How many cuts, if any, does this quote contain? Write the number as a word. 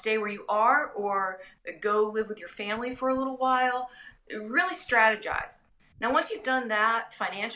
zero